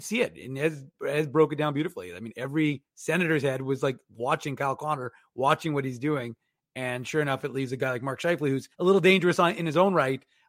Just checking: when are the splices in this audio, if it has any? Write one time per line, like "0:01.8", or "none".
0:08.7